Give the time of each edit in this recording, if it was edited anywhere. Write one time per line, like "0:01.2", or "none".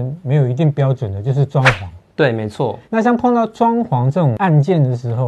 0:02.8